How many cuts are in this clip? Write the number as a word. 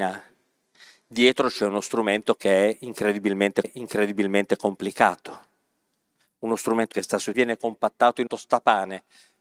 four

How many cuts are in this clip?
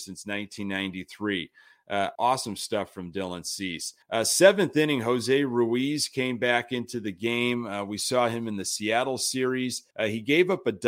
three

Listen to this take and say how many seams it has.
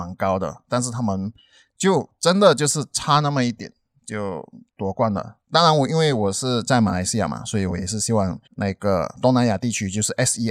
one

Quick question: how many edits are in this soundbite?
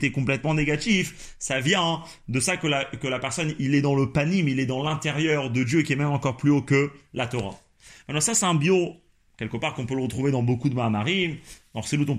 zero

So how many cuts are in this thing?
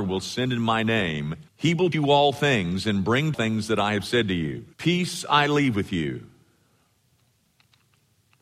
four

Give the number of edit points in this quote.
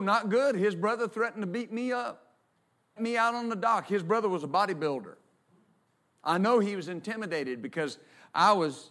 one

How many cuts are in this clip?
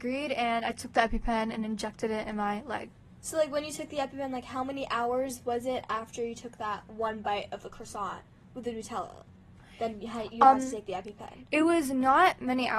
zero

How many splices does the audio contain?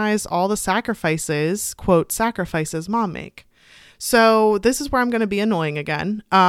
zero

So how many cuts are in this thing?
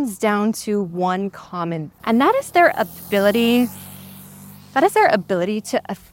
one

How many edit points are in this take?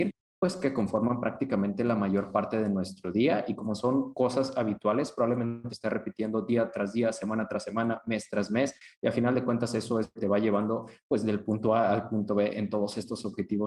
two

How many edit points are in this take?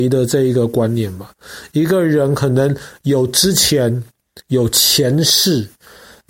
one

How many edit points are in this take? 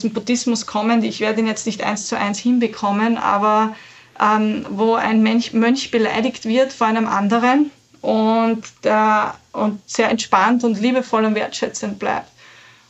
zero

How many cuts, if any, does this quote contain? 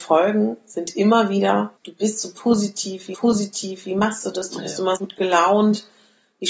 three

